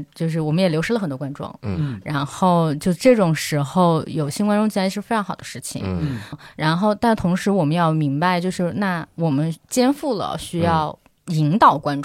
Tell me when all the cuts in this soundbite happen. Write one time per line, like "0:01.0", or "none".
0:06.3